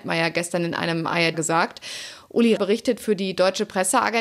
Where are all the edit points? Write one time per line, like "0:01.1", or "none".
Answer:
0:01.3
0:02.6